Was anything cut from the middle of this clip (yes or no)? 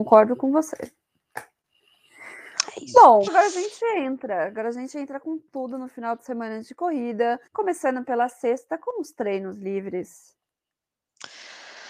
yes